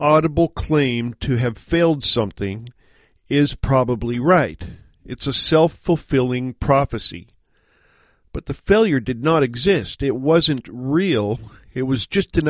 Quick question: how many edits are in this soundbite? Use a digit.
0